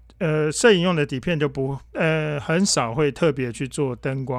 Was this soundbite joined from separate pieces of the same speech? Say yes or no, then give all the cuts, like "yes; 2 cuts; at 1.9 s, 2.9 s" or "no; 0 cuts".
yes; 1 cut; at 1.8 s